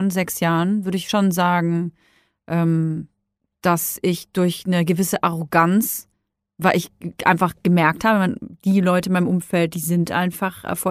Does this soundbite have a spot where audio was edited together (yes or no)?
no